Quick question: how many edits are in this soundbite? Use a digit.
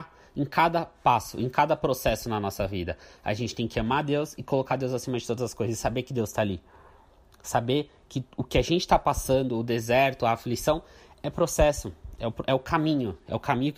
0